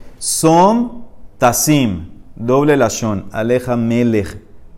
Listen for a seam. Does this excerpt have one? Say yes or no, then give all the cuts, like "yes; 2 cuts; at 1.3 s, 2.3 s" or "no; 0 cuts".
no; 0 cuts